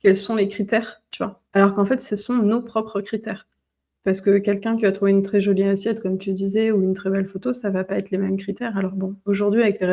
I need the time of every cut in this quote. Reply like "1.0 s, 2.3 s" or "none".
none